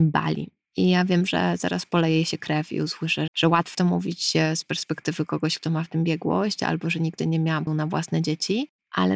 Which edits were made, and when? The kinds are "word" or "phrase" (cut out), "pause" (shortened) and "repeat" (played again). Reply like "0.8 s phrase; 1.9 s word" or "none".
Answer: 3.3 s word; 3.7 s word; 7.7 s word